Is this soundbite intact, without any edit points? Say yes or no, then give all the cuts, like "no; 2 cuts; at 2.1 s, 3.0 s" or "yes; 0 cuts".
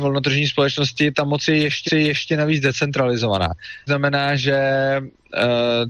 no; 2 cuts; at 1.9 s, 3.9 s